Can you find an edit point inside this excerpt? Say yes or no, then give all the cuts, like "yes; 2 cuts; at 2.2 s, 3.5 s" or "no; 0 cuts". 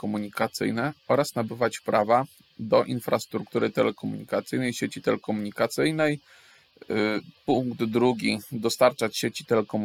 no; 0 cuts